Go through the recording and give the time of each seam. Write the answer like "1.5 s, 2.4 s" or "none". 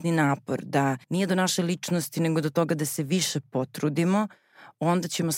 1.0 s